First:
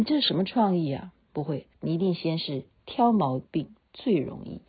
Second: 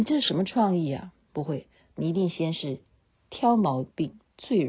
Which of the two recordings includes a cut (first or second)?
first